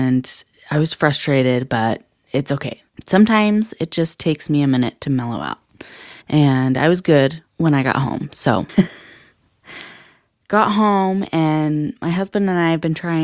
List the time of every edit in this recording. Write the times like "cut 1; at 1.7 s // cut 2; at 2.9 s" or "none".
cut 1; at 6.2 s // cut 2; at 7.5 s